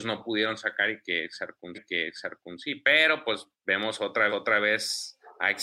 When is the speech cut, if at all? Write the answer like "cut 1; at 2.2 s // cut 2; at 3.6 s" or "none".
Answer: cut 1; at 1.7 s // cut 2; at 3.5 s // cut 3; at 4.3 s